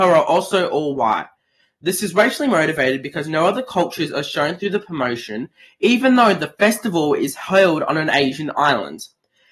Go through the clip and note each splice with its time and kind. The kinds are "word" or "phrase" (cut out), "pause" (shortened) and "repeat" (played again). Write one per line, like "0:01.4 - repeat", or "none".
none

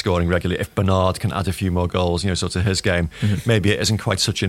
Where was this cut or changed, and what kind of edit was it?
none

